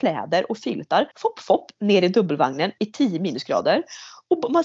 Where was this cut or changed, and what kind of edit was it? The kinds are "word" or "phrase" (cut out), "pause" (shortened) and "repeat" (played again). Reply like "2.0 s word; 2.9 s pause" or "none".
1.1 s pause; 2.8 s word